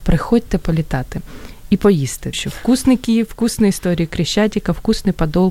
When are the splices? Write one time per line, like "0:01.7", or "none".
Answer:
0:02.3